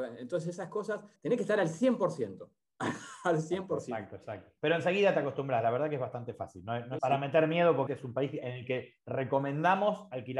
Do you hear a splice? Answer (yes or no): yes